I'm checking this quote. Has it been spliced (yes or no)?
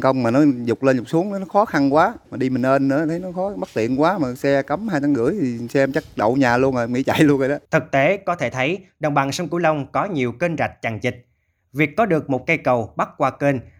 yes